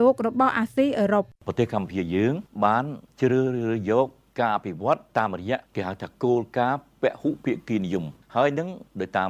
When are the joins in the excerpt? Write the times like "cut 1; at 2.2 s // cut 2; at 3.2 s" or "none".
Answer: cut 1; at 1.3 s